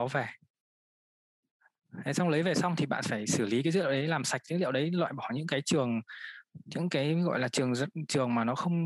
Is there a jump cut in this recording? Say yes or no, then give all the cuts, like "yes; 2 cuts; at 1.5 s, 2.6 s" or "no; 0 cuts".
no; 0 cuts